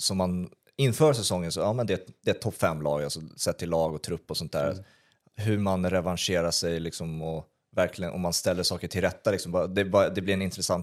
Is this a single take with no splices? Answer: yes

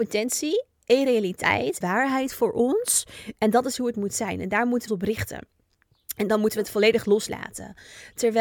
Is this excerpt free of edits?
no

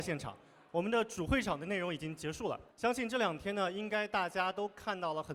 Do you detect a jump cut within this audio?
yes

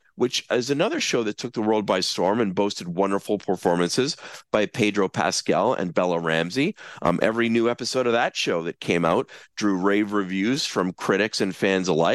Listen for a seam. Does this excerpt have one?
no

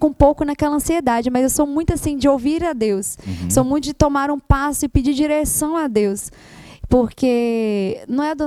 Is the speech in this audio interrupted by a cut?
no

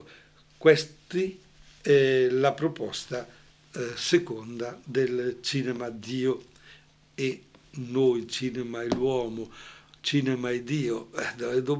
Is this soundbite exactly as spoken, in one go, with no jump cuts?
yes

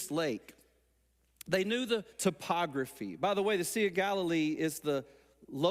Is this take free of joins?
no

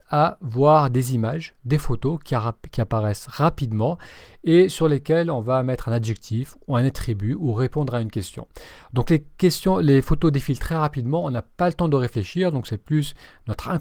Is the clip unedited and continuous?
yes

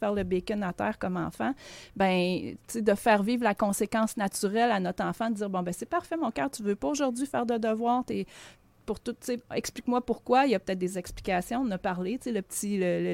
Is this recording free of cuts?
yes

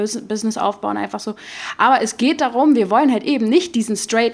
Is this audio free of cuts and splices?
yes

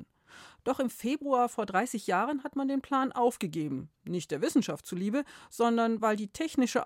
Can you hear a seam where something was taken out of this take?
no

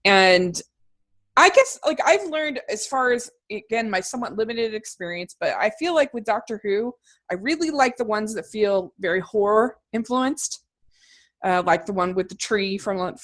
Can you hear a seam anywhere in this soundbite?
no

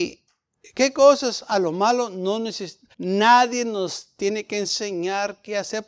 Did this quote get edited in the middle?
yes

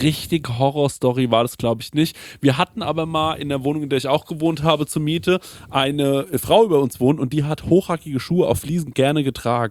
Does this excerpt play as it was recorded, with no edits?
yes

